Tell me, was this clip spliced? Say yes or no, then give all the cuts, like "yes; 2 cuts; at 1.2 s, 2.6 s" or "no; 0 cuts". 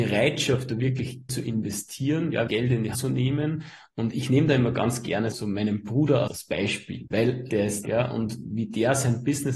yes; 8 cuts; at 1.3 s, 2.5 s, 2.9 s, 5.3 s, 6.3 s, 7.1 s, 7.5 s, 7.8 s